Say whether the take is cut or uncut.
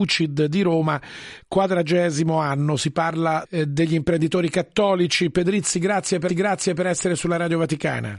cut